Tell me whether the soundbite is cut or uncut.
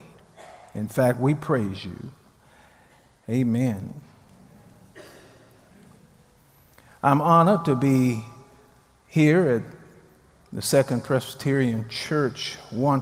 uncut